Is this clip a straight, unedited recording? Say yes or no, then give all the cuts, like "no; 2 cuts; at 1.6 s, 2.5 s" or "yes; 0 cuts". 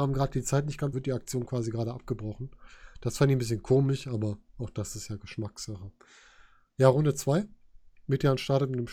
no; 1 cut; at 0.9 s